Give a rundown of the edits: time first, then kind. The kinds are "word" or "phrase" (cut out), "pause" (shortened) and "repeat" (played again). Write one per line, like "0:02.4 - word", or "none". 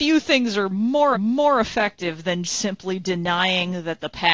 0:01.1 - repeat
0:02.4 - word

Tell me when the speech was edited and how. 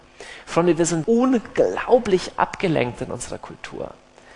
0:01.0 - word

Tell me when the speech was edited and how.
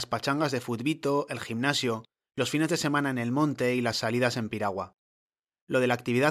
none

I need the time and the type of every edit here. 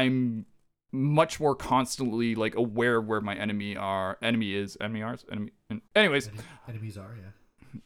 0:05.9 - pause

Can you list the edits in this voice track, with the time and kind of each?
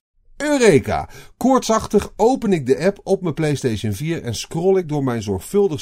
none

